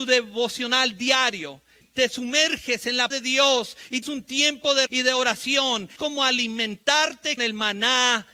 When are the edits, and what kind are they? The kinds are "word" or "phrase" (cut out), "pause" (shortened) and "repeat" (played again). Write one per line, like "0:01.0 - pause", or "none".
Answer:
0:01.8 - word
0:03.1 - word
0:04.0 - word
0:04.9 - word
0:06.0 - word
0:07.4 - word